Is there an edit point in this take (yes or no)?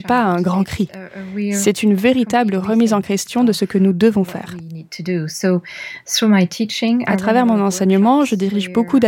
no